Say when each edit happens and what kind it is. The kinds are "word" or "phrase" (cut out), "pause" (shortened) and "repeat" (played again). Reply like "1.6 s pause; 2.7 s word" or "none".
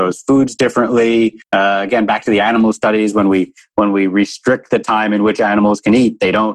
1.4 s pause